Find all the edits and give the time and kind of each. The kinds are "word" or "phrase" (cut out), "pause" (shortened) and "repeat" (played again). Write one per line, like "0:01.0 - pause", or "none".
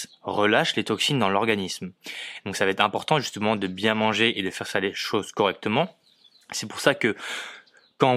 none